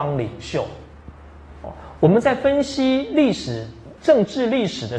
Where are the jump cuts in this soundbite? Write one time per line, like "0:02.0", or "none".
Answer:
0:04.0